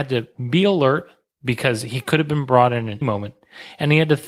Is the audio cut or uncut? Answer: cut